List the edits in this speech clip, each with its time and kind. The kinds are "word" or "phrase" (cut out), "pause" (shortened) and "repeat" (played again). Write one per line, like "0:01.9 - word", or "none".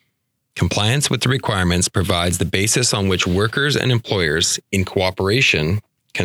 none